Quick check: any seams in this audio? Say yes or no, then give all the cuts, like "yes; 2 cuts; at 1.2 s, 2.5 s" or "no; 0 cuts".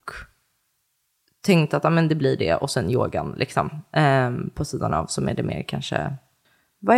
no; 0 cuts